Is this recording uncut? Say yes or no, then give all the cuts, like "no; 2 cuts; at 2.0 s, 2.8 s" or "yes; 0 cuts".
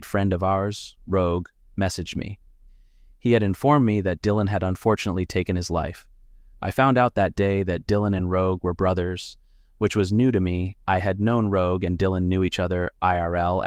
yes; 0 cuts